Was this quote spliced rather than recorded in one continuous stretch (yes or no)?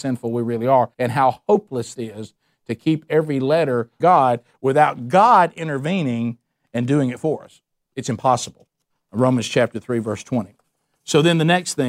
yes